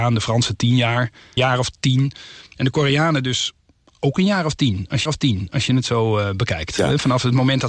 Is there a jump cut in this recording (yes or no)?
yes